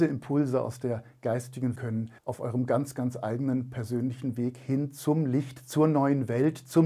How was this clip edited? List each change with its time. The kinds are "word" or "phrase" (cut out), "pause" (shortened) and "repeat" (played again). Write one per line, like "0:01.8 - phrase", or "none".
0:01.8 - phrase
0:02.2 - pause